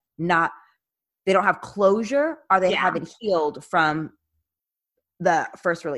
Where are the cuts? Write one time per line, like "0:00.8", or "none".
none